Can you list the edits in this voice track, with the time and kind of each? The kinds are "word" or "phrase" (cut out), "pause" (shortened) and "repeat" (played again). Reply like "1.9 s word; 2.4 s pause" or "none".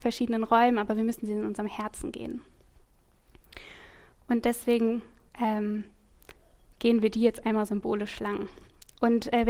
none